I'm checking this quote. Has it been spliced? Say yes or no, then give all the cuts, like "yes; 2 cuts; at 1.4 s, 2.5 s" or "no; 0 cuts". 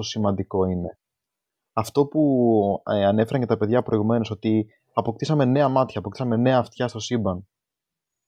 no; 0 cuts